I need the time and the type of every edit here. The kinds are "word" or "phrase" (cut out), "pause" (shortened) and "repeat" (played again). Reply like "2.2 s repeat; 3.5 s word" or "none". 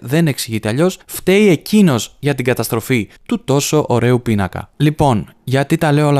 1.0 s pause; 3.2 s pause; 4.7 s pause